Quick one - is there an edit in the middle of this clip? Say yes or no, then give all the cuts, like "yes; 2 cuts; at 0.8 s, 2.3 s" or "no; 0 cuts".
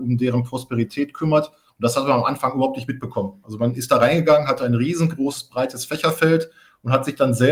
no; 0 cuts